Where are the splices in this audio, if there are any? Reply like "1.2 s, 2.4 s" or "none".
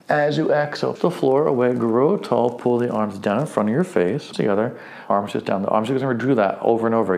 1.0 s, 4.3 s, 5.1 s